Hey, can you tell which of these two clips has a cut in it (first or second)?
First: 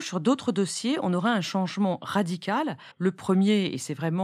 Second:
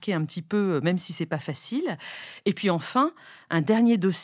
first